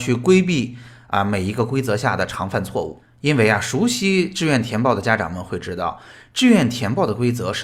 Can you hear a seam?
no; 0 cuts

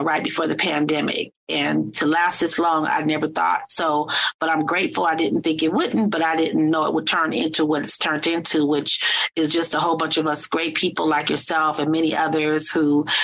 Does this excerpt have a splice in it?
no; 0 cuts

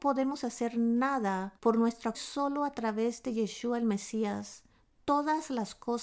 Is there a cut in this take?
yes; 2 cuts; at 1.6 s, 2.1 s

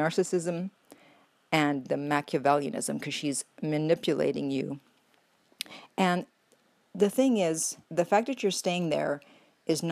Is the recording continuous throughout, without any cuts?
no; 2 cuts; at 1.9 s, 7.8 s

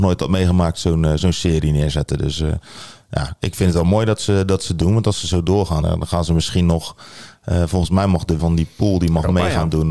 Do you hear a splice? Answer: yes; 2 cuts; at 5.8 s, 8.4 s

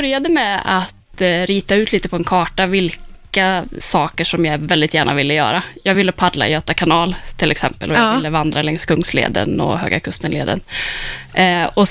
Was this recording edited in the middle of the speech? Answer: no; 0 cuts

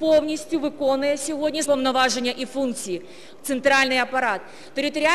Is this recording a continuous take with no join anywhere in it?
no; 1 cut; at 1.6 s

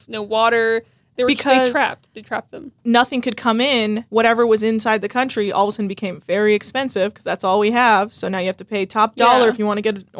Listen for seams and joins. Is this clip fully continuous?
no; 1 cut; at 4.1 s

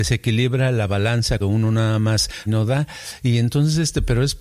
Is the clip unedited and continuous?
no; 2 cuts; at 1.4 s, 2.5 s

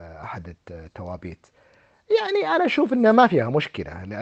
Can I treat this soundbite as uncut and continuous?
yes; 0 cuts

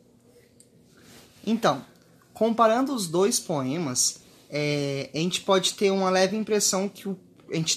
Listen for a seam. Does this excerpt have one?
no; 0 cuts

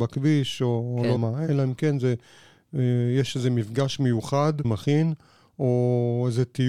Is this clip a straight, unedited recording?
no; 2 cuts; at 1.2 s, 4.6 s

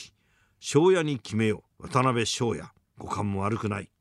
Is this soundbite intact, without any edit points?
no; 2 cuts; at 1.7 s, 2.8 s

